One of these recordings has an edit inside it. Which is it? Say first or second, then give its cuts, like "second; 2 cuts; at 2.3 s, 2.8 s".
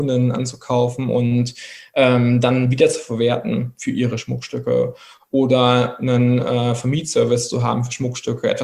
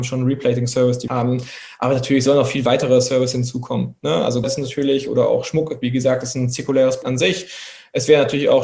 second; 3 cuts; at 1.1 s, 4.4 s, 7.0 s